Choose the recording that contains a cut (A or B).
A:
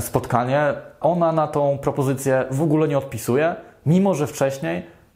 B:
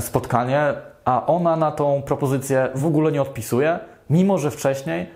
A